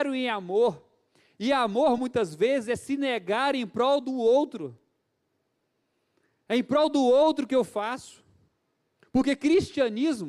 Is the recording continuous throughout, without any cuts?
yes; 0 cuts

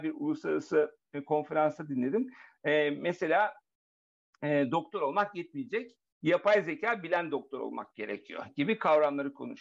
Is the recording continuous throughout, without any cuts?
yes; 0 cuts

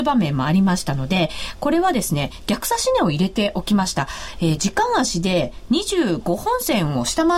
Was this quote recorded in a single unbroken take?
no; 1 cut; at 4.6 s

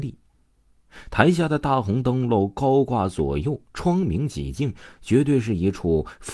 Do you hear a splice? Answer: no; 0 cuts

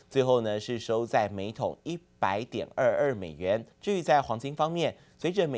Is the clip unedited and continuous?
no; 1 cut; at 3.7 s

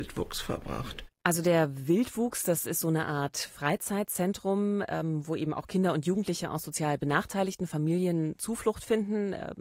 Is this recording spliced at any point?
no; 0 cuts

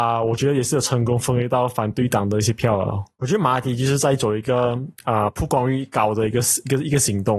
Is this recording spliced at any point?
yes; 1 cut; at 3.1 s

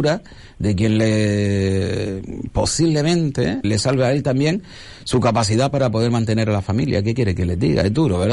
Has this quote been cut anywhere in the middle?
yes; 1 cut; at 3.6 s

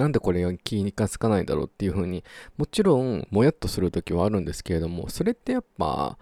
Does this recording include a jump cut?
no; 0 cuts

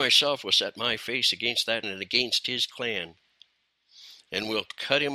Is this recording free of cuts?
no; 1 cut; at 1.8 s

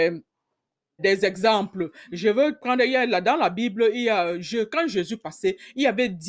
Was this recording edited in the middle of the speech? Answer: yes; 1 cut; at 1.0 s

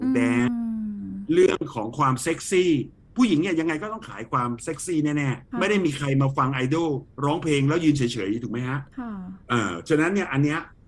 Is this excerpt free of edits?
no; 4 cuts; at 5.5 s, 7.1 s, 8.9 s, 9.4 s

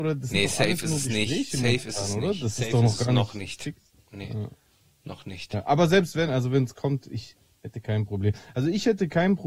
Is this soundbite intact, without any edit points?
yes; 0 cuts

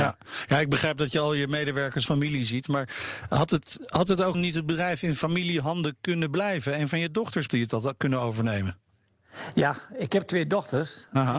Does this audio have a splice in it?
yes; 3 cuts; at 2.1 s, 4.3 s, 7.5 s

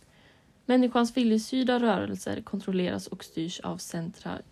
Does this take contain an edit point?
no; 0 cuts

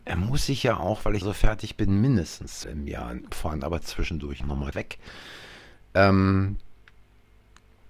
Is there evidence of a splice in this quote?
yes; 5 cuts; at 1.2 s, 2.6 s, 3.3 s, 4.4 s, 4.7 s

